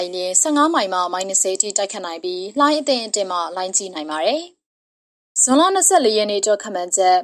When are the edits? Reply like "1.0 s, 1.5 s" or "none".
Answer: none